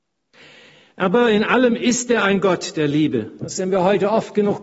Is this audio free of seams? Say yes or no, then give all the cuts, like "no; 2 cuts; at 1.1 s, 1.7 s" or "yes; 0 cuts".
yes; 0 cuts